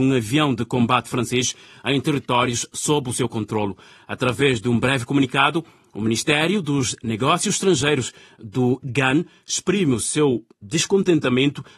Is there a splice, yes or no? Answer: no